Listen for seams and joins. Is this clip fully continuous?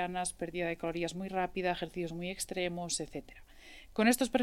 yes; 0 cuts

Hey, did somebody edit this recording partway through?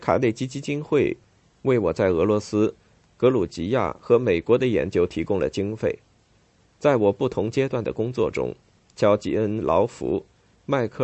no; 0 cuts

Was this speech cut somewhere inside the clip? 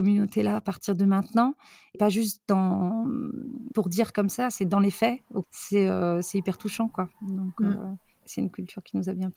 yes; 4 cuts; at 2.0 s, 3.7 s, 5.4 s, 8.2 s

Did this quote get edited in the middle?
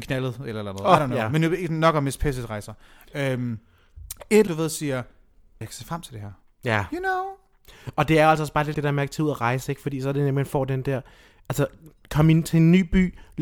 yes; 3 cuts; at 4.5 s, 5.6 s, 8.7 s

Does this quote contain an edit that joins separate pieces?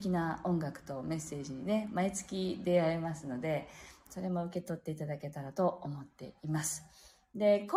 no; 0 cuts

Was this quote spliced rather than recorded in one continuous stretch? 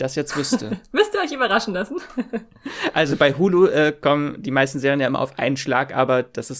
no; 0 cuts

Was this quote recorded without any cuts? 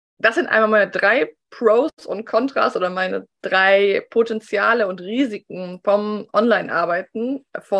yes; 0 cuts

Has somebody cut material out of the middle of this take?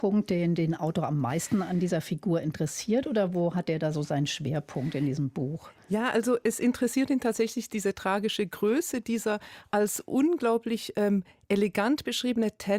no; 0 cuts

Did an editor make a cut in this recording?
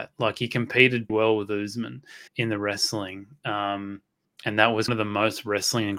yes; 4 cuts; at 1.1 s, 2.3 s, 4.2 s, 4.9 s

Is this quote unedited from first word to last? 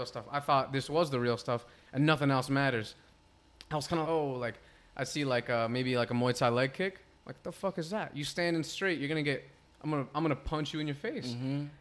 no; 1 cut; at 4.0 s

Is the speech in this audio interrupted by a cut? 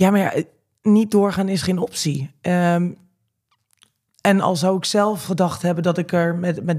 no; 0 cuts

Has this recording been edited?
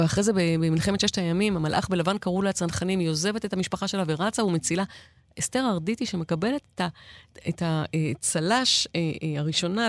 no; 0 cuts

